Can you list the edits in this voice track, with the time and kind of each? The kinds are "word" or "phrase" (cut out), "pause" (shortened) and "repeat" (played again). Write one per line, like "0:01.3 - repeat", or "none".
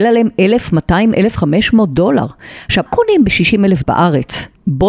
0:02.9 - word
0:03.8 - word

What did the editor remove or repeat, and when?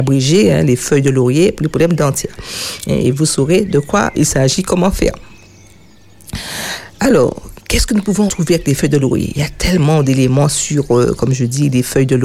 0:04.1 - word
0:08.3 - word

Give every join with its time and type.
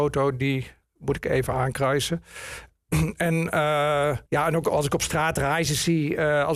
0:04.3 - pause

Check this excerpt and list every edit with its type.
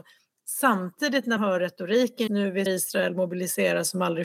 0:01.4 - word
0:02.3 - word
0:02.7 - word

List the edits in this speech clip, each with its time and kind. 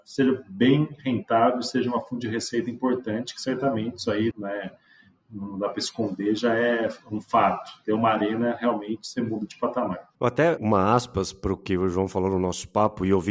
0:04.3 - word
0:10.1 - pause
0:10.6 - phrase

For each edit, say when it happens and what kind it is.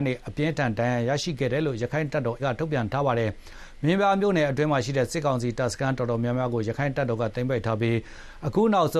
0:02.4 - word

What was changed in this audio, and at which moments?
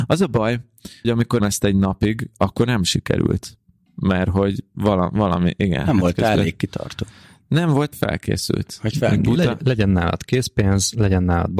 0:01.0 - word
0:01.4 - word
0:07.9 - word

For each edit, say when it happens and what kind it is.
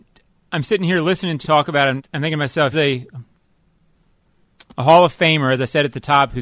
0:01.4 - word
0:02.0 - word
0:02.7 - word

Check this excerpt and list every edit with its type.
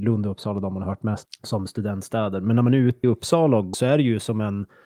0:01.2 - word
0:03.0 - word
0:03.7 - word

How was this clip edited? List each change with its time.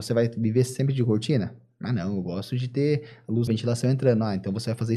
0:03.5 - word

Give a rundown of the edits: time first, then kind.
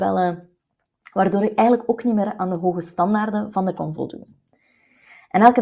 0:03.7 - word

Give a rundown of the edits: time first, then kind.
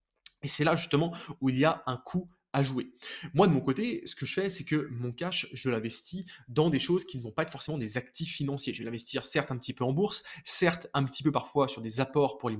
none

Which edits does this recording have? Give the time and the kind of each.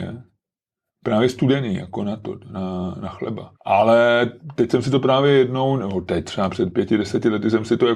0:03.6 - pause

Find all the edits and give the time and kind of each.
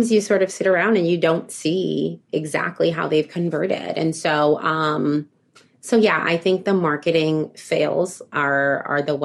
none

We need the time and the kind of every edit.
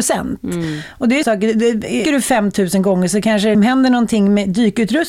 0:01.2 - word
0:02.0 - word
0:03.5 - word

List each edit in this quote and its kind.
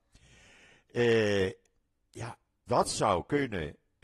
0:02.7 - word

